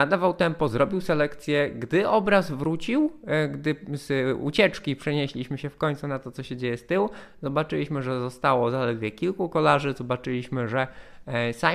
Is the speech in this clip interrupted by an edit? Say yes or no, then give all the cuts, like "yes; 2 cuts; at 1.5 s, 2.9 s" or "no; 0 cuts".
no; 0 cuts